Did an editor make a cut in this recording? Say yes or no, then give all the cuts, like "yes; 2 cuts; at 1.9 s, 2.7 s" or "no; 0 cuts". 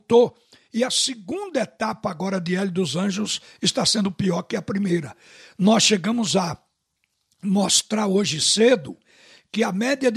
no; 0 cuts